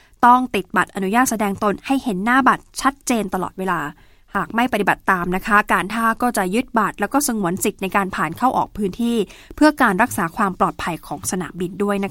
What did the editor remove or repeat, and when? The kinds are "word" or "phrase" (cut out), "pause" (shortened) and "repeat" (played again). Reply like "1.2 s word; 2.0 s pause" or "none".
none

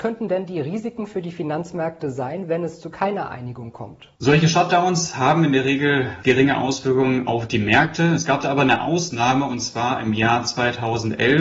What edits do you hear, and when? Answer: 4.2 s pause; 6.2 s word

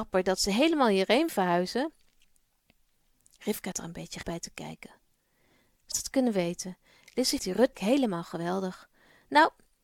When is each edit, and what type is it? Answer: 1.3 s word; 3.7 s word; 4.2 s word; 5.9 s word; 7.4 s word; 7.7 s word

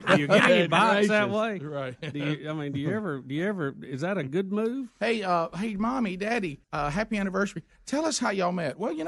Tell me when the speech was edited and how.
6.6 s pause

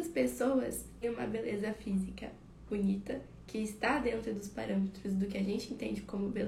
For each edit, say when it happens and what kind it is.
1.0 s word; 2.7 s word

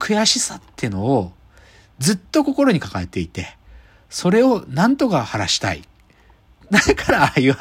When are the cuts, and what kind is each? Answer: none

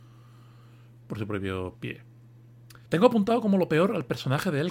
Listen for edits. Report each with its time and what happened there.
2.9 s pause

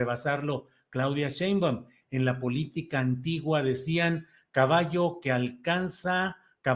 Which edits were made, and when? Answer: none

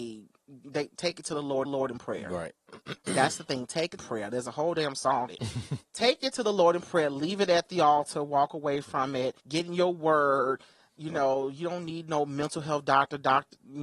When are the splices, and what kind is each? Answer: 1.7 s repeat; 4.0 s phrase; 5.3 s word; 9.4 s pause

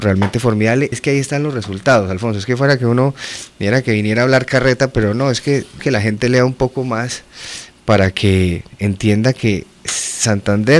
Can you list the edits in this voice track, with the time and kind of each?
0.9 s word; 5.8 s word

